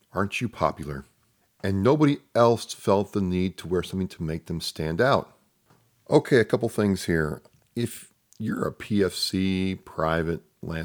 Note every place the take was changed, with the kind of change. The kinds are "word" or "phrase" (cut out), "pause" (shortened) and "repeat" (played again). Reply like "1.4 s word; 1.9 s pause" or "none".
none